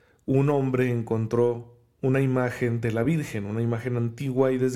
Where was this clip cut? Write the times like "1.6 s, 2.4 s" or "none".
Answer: none